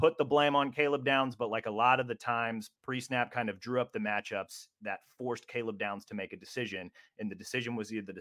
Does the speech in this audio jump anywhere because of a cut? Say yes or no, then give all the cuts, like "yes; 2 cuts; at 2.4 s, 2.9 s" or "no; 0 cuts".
yes; 1 cut; at 2.8 s